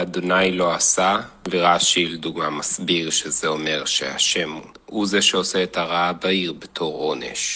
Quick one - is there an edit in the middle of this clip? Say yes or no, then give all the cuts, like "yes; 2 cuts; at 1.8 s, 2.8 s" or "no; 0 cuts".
no; 0 cuts